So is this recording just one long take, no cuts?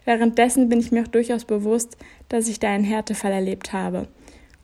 yes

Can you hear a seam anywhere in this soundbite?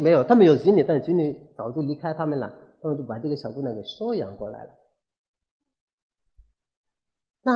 no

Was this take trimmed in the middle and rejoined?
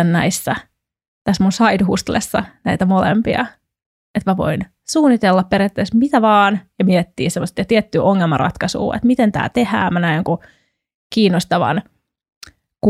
no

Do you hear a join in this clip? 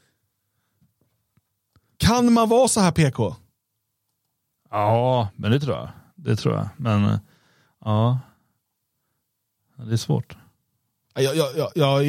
no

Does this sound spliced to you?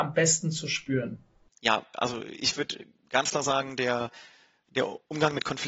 no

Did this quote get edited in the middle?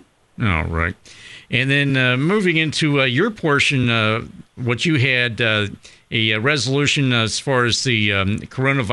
no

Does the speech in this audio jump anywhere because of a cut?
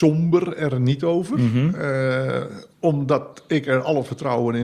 yes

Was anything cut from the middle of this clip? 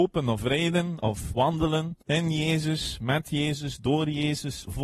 yes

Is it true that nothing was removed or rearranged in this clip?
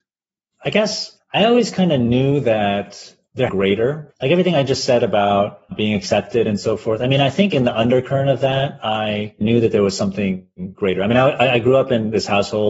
no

